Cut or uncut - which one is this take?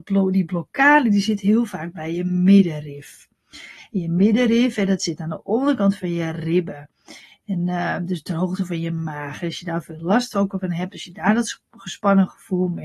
uncut